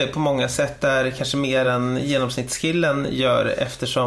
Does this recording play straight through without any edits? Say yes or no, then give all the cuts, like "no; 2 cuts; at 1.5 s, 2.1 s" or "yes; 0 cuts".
yes; 0 cuts